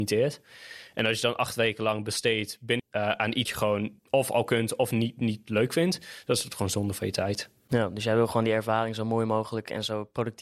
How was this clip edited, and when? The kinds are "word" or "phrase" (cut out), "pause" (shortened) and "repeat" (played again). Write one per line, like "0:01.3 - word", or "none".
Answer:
0:02.8 - phrase
0:03.5 - word
0:04.0 - pause